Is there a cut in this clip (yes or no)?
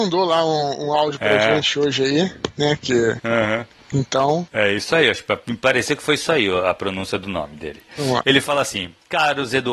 no